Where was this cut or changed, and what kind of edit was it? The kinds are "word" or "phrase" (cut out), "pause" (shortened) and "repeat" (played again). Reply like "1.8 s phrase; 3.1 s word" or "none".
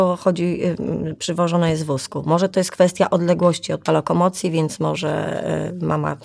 3.9 s phrase